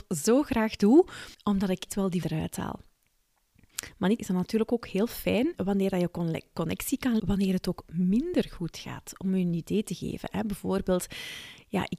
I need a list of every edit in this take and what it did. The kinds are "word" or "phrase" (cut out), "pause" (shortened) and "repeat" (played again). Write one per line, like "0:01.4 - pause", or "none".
0:01.3 - pause
0:01.9 - word
0:02.2 - word
0:04.2 - word
0:05.5 - word
0:07.2 - word